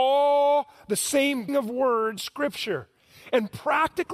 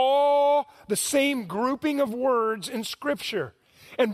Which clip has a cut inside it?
first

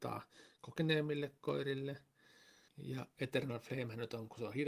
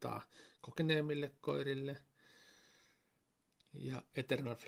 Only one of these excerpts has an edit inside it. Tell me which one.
first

